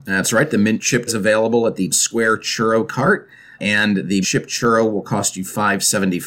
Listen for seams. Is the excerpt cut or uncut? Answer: cut